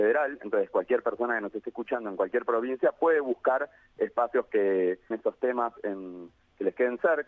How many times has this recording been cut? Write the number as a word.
one